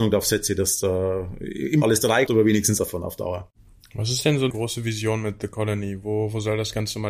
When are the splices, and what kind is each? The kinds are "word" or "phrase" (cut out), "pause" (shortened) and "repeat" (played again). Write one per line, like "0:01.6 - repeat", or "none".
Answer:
0:01.8 - word
0:02.3 - word
0:02.8 - word
0:04.5 - word